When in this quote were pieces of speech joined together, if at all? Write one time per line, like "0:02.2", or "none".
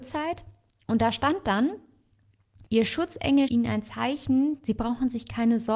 0:02.7
0:03.5